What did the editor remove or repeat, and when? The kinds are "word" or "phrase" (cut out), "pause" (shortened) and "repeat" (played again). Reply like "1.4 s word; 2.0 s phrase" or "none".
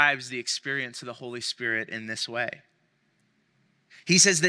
none